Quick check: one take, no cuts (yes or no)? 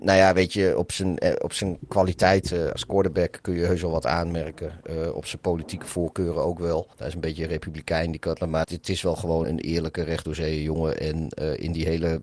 no